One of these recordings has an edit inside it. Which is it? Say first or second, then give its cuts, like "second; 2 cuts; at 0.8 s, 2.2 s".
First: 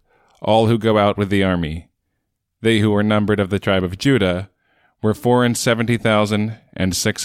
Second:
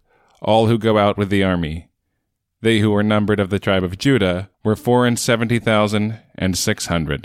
second; 1 cut; at 4.5 s